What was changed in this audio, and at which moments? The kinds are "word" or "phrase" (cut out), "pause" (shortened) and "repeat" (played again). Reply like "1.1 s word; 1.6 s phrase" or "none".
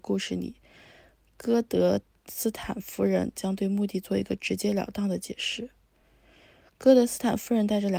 none